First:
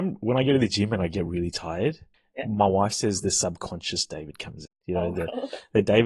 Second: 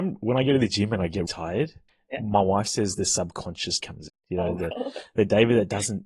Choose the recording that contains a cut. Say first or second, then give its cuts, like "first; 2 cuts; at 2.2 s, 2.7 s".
second; 2 cuts; at 1.3 s, 3.8 s